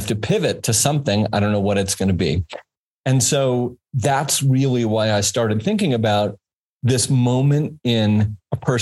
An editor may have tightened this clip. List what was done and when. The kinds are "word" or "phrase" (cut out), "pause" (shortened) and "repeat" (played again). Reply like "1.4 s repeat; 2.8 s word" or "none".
none